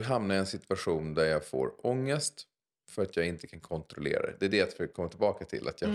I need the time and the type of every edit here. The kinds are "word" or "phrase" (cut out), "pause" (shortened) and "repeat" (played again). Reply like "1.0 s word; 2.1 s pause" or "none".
none